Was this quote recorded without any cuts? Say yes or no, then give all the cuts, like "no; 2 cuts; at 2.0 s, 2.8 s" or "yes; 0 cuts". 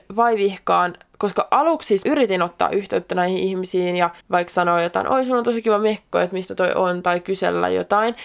no; 2 cuts; at 2.0 s, 4.2 s